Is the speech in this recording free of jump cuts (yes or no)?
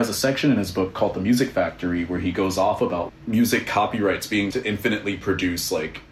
no